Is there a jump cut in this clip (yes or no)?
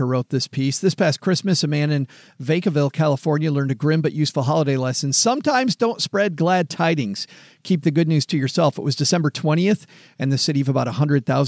no